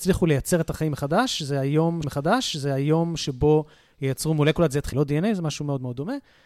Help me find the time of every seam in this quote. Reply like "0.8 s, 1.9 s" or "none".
2.0 s, 4.9 s